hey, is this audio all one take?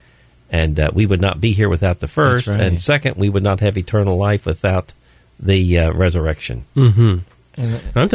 yes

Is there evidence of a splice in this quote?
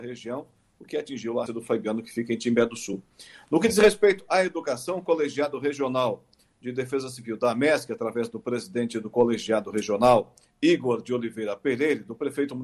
yes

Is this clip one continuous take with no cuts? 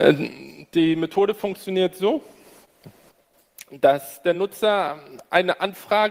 yes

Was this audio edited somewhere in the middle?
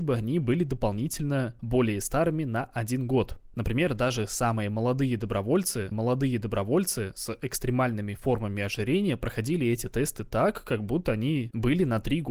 yes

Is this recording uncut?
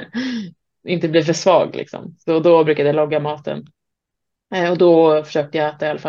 yes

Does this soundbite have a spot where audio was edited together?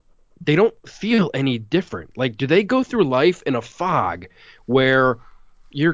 no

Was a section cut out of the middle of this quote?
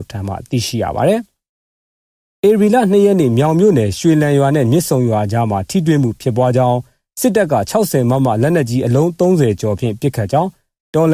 no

